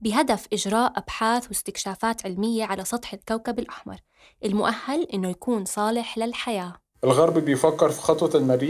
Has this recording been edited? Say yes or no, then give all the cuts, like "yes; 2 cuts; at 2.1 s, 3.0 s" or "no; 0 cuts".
no; 0 cuts